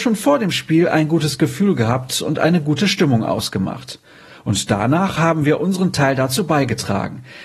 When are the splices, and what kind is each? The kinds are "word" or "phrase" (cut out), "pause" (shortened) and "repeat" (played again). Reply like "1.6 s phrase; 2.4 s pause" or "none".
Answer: none